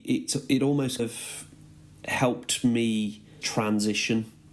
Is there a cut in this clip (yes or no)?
yes